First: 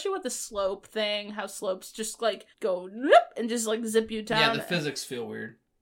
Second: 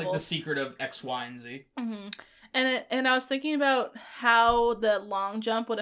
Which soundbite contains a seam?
first; 1 cut; at 2.5 s

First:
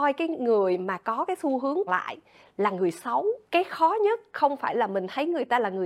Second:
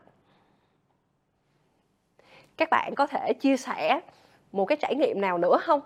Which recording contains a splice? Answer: first; 2 cuts; at 1.9 s, 3.4 s

